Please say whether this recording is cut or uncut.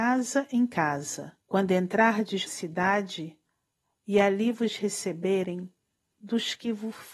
cut